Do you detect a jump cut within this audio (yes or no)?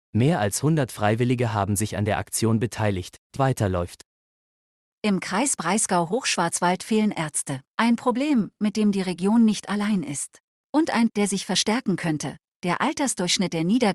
yes